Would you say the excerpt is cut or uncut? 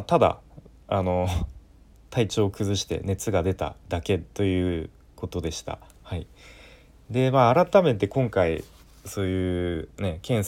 uncut